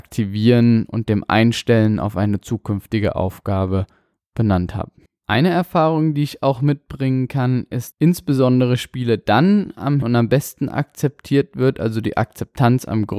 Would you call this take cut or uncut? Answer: cut